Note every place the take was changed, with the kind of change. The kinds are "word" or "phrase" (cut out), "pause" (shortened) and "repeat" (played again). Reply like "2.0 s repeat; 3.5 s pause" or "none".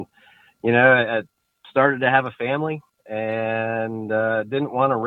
none